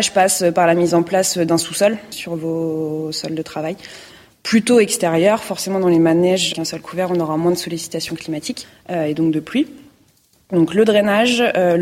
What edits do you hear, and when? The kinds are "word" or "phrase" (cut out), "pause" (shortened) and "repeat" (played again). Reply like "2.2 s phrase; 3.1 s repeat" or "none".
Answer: none